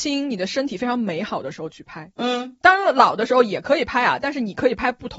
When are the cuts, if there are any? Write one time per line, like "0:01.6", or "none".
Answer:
0:02.1